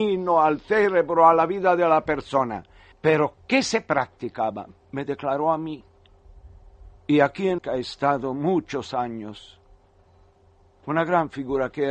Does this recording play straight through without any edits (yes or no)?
no